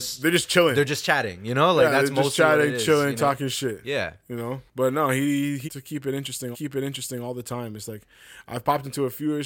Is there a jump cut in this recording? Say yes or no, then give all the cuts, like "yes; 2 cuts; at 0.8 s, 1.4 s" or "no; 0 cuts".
yes; 3 cuts; at 4.7 s, 5.6 s, 6.5 s